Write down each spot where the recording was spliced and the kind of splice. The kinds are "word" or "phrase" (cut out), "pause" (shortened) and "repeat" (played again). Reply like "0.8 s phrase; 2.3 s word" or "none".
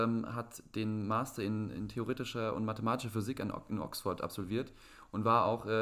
none